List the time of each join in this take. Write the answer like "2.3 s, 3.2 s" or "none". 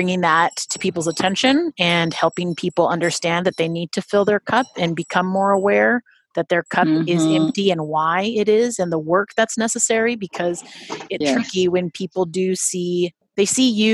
11.2 s